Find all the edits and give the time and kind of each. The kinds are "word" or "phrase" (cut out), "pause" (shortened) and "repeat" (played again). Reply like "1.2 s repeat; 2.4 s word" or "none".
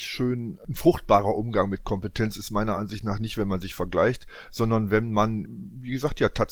5.4 s word